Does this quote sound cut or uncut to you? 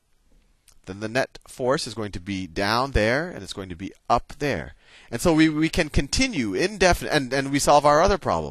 uncut